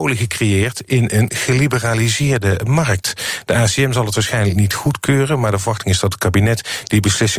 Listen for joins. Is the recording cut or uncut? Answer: uncut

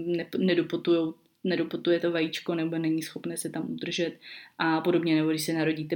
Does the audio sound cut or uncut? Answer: uncut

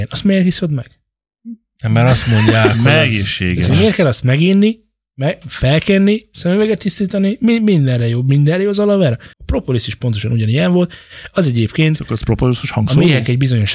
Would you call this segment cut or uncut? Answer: cut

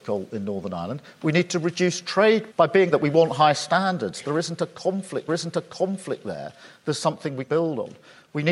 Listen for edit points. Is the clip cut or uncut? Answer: cut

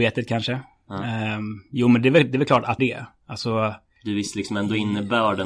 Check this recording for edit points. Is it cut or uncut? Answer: cut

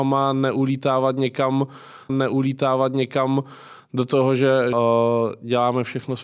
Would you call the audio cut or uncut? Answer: cut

